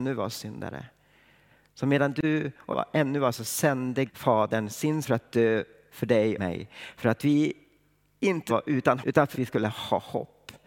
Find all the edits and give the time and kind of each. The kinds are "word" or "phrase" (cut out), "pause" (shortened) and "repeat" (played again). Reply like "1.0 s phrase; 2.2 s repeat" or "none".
2.7 s word; 3.3 s word; 4.1 s word; 5.0 s word; 6.4 s word; 8.5 s word; 9.0 s word; 9.3 s word